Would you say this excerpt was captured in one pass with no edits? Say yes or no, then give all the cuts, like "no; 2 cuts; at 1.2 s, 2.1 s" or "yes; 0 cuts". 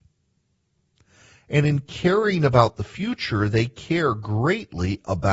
yes; 0 cuts